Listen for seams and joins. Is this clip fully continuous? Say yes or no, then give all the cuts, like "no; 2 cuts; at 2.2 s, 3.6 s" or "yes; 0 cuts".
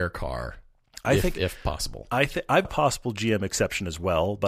no; 1 cut; at 2.6 s